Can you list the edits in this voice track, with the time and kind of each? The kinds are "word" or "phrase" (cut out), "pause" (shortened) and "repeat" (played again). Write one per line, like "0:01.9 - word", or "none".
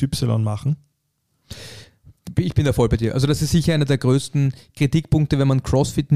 none